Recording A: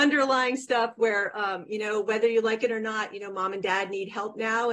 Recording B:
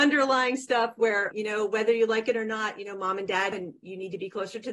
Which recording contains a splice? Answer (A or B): B